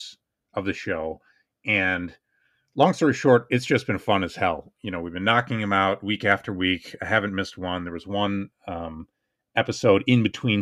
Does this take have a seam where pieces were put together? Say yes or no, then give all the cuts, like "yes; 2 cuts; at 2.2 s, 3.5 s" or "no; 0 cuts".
no; 0 cuts